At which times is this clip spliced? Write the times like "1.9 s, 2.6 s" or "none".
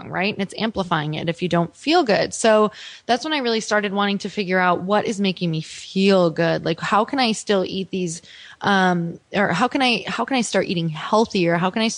none

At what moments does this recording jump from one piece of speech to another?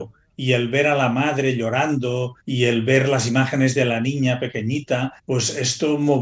2.4 s, 5.2 s

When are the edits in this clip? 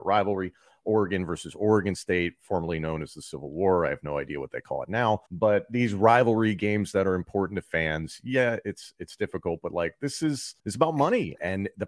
5.3 s, 10.6 s

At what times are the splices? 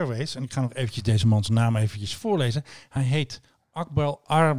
none

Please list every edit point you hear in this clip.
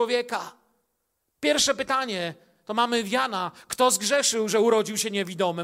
none

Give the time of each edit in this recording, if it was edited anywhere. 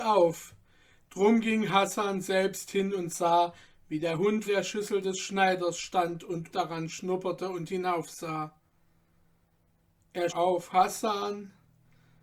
4.4 s, 6.5 s, 10.3 s

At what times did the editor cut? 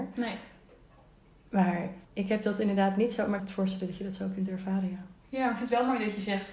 2.0 s, 3.4 s

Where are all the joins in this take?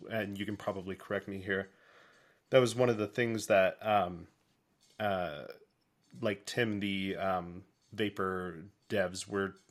none

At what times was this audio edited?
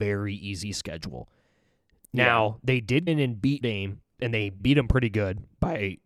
3.1 s, 3.6 s, 4.1 s, 4.6 s

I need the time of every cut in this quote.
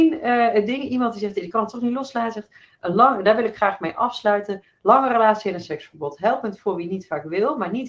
none

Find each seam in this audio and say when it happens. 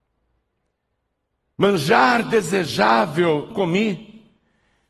3.5 s

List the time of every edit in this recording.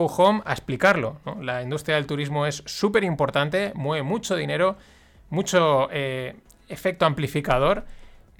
none

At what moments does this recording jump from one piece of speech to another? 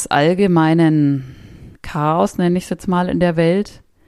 1.7 s

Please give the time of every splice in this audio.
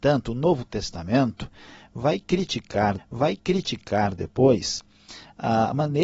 3.0 s

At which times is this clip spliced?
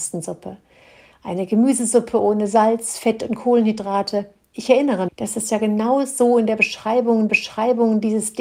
5.1 s, 7.3 s

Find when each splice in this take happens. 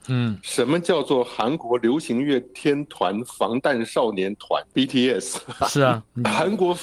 5.6 s

